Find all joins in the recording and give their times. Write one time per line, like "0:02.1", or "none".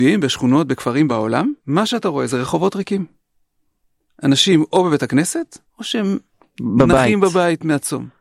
0:01.1
0:01.6
0:05.7